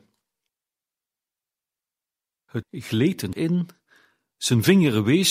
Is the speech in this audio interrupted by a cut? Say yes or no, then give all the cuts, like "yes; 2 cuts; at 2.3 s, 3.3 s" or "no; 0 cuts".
yes; 2 cuts; at 2.6 s, 3.3 s